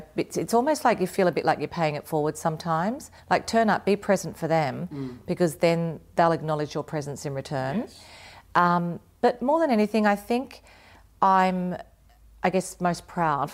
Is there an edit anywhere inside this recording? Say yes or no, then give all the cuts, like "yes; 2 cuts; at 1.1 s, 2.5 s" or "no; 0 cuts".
yes; 1 cut; at 3.2 s